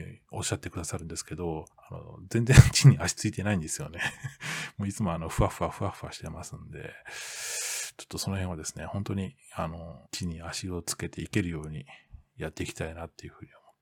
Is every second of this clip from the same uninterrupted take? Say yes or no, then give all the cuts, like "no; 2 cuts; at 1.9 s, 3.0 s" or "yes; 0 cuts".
no; 2 cuts; at 1.7 s, 10.1 s